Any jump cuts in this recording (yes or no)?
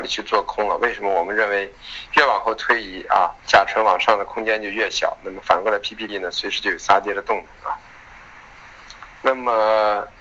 yes